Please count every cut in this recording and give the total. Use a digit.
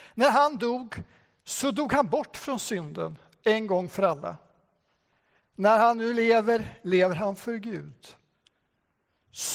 0